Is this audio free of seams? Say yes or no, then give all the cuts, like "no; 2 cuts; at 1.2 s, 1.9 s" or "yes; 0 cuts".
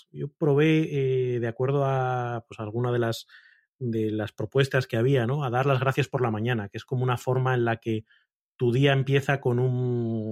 yes; 0 cuts